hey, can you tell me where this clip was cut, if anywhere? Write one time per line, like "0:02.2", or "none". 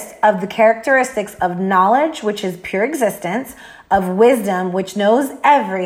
none